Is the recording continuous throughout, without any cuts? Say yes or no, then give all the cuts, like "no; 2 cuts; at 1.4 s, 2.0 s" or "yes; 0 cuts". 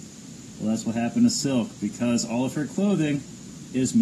yes; 0 cuts